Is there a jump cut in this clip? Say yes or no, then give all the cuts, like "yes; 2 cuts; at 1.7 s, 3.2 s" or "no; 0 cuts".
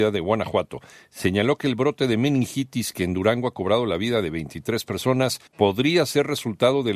yes; 1 cut; at 5.5 s